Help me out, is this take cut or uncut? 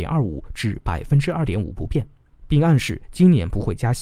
uncut